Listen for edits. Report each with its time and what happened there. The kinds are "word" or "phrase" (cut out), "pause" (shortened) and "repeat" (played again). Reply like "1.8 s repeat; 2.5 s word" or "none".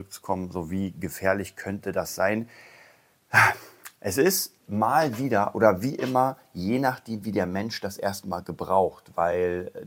4.6 s pause